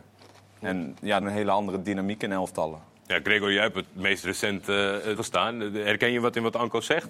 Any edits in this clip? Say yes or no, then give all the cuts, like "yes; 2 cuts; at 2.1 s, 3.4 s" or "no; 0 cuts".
yes; 2 cuts; at 1.2 s, 5.2 s